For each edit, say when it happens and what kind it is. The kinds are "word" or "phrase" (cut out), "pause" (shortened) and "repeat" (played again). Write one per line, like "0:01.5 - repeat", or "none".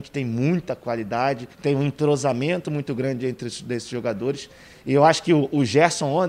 0:01.5 - pause